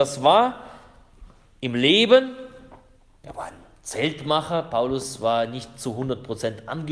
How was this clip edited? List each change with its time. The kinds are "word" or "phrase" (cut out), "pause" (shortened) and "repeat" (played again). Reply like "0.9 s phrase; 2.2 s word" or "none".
none